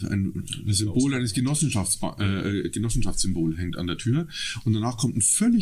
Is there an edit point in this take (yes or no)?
no